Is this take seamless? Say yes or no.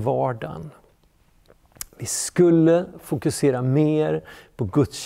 yes